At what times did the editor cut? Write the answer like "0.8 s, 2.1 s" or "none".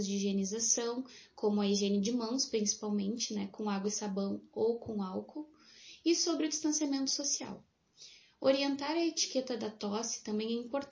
none